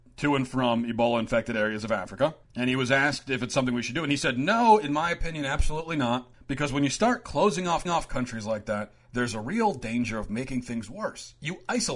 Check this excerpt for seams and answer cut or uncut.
cut